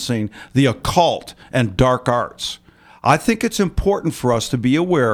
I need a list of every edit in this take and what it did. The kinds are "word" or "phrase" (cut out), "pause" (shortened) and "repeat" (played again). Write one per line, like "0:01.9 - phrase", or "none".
none